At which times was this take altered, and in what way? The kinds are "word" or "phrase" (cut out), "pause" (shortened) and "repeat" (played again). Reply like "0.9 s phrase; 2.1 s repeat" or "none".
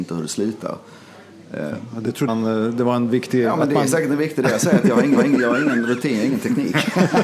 2.3 s phrase; 5.2 s repeat